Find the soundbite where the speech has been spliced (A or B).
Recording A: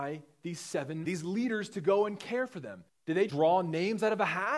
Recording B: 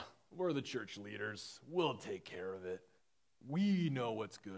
A